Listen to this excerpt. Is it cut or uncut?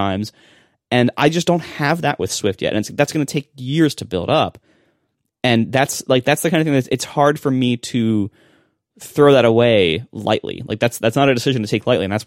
uncut